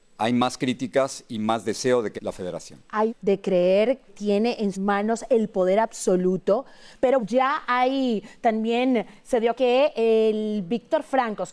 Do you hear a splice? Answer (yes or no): yes